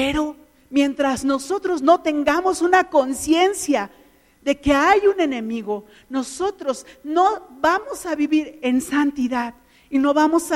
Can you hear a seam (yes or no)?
no